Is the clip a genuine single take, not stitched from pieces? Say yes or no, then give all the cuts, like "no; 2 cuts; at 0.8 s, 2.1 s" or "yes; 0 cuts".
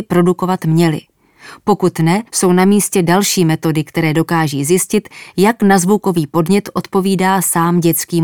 no; 1 cut; at 2.3 s